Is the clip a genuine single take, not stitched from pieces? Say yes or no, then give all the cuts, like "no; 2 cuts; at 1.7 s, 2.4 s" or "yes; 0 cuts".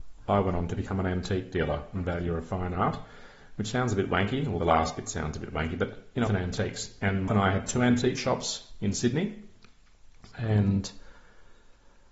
no; 3 cuts; at 4.6 s, 6.3 s, 7.3 s